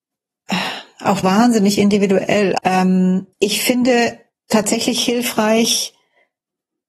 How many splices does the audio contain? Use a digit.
3